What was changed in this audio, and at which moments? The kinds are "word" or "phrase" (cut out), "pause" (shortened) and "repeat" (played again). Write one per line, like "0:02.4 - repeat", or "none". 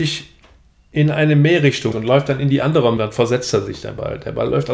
0:01.9 - word
0:03.0 - word